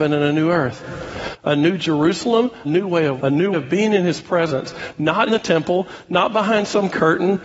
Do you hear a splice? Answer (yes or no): yes